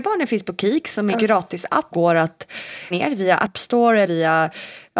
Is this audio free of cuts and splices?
no; 4 cuts; at 1.1 s, 1.9 s, 2.9 s, 4.0 s

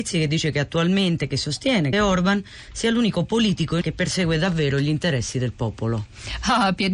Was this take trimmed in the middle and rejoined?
yes; 2 cuts; at 1.9 s, 3.8 s

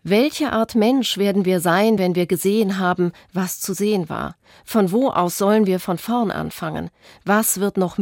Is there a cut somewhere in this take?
no; 0 cuts

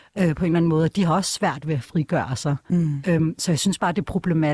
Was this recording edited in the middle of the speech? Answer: no; 0 cuts

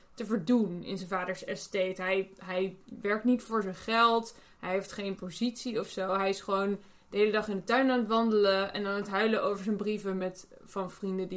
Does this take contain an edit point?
no; 0 cuts

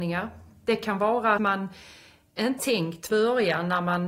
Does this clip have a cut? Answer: yes; 3 cuts; at 1.4 s, 2.6 s, 3.1 s

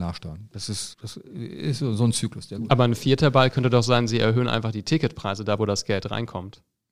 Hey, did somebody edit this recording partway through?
yes; 1 cut; at 0.9 s

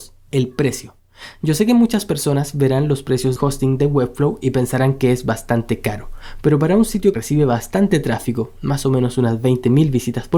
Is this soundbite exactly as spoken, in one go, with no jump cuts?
no; 2 cuts; at 3.4 s, 7.1 s

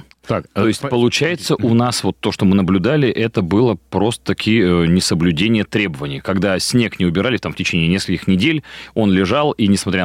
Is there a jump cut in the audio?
no; 0 cuts

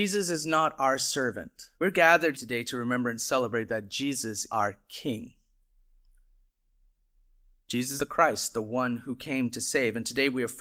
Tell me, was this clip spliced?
yes; 4 cuts; at 1.7 s, 2.3 s, 4.5 s, 8.0 s

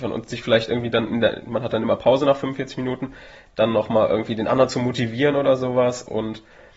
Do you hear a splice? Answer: no; 0 cuts

